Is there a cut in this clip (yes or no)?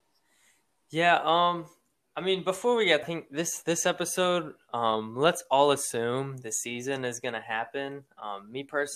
yes